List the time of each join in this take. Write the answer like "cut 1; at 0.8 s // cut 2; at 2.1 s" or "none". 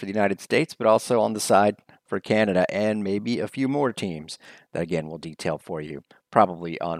none